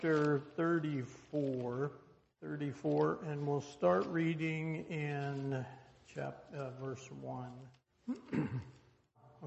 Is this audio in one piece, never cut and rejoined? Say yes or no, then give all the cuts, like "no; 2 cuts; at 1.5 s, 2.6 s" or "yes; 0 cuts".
yes; 0 cuts